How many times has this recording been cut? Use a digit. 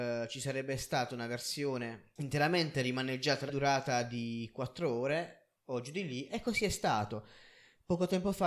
2